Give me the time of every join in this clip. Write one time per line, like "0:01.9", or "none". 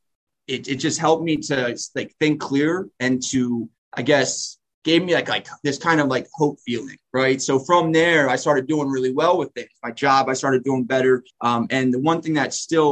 0:03.8
0:04.7
0:11.3